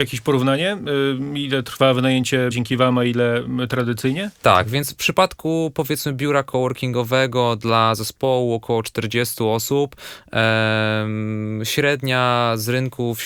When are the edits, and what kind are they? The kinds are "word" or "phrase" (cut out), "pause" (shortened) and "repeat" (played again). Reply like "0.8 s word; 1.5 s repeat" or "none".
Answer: 2.5 s word